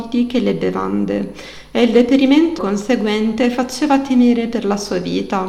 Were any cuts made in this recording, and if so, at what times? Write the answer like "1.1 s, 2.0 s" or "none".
2.6 s

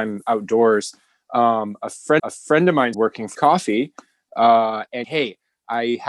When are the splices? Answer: 2.2 s, 2.9 s, 3.3 s, 5.0 s

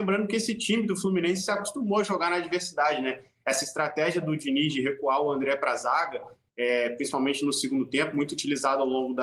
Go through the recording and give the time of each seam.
none

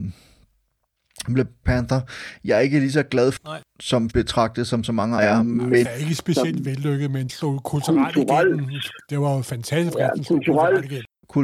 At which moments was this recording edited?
1.6 s, 3.4 s, 4.1 s, 5.2 s, 5.8 s, 7.3 s

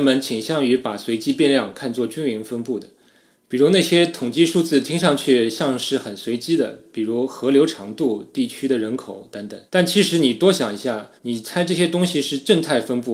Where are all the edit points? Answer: 9.7 s, 11.2 s

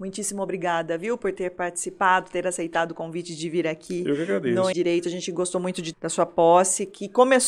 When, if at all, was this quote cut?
4.7 s, 5.9 s

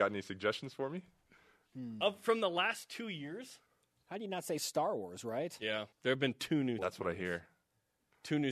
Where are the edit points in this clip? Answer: 5.9 s, 6.8 s

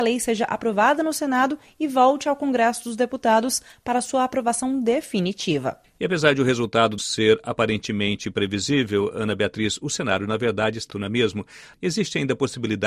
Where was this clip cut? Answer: 7.0 s, 10.9 s

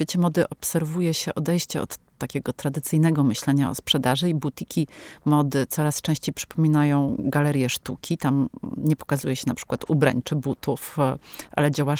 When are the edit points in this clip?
none

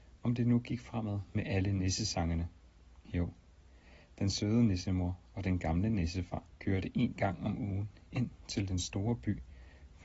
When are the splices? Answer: 3.0 s, 6.5 s

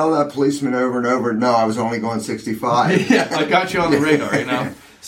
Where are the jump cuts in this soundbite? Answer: 3.3 s

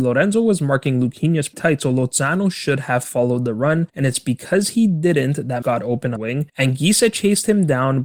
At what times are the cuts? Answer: 1.5 s, 3.9 s, 5.6 s, 6.2 s, 6.5 s

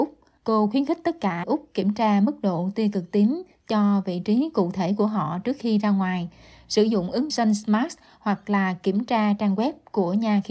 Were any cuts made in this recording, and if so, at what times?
1.4 s, 7.3 s

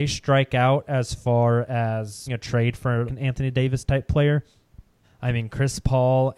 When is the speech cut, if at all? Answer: 2.3 s, 3.1 s, 5.0 s

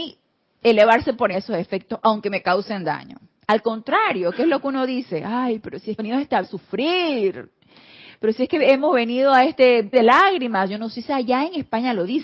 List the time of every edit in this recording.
1.3 s, 6.0 s, 6.4 s, 9.9 s

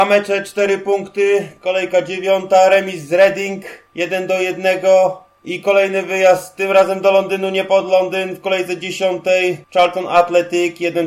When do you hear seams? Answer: 9.6 s

